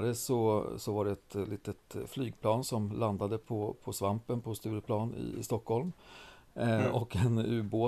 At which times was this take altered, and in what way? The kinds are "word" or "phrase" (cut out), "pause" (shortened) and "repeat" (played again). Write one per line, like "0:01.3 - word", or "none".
none